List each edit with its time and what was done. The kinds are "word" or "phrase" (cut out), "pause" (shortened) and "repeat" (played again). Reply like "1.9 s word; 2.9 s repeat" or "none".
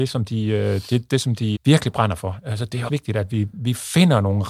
1.6 s word; 2.9 s word